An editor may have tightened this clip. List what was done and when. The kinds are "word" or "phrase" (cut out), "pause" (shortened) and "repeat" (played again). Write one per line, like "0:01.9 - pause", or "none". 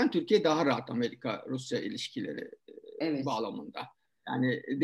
none